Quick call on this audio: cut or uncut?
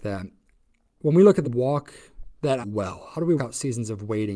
cut